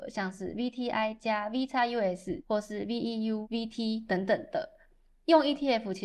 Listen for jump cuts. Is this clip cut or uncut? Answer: uncut